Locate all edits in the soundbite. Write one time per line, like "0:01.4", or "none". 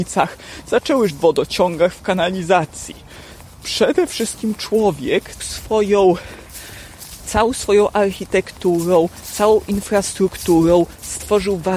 0:01.1
0:05.4

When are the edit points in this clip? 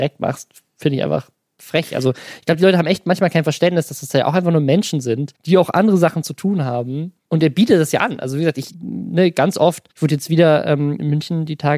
0:05.4
0:07.2
0:09.9

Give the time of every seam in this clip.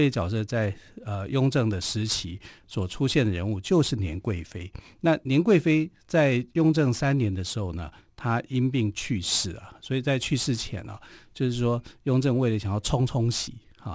none

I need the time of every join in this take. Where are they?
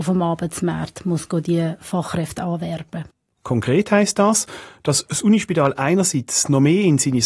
none

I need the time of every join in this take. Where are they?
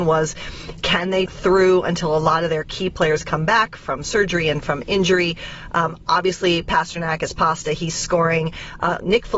0:01.3

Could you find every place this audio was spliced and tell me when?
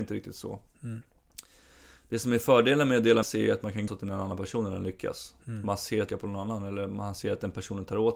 0:03.2
0:03.9
0:06.1

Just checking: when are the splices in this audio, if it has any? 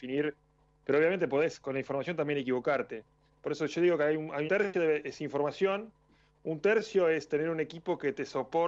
0:04.5

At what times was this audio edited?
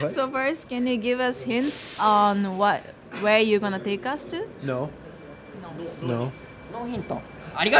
none

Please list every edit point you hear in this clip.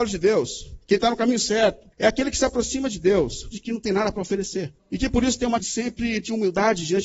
0:01.9
0:03.5
0:04.8
0:05.6

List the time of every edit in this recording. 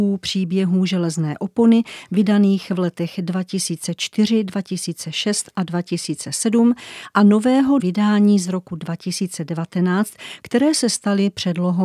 0:07.8

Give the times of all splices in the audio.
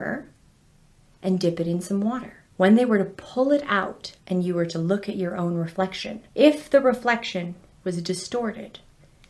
0:02.5
0:04.2
0:06.3

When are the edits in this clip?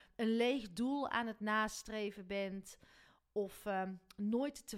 none

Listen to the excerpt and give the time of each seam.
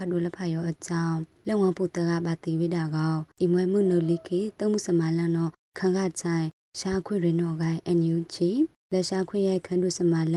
0:03.3

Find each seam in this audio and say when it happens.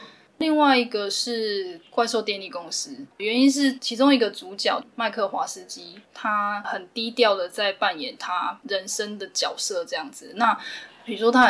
0:03.1
0:06.0

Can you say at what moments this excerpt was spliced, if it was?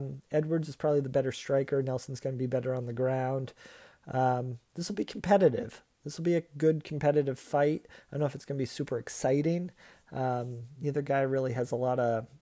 none

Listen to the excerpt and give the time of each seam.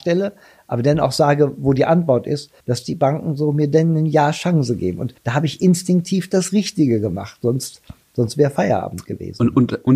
0:02.6
0:05.2

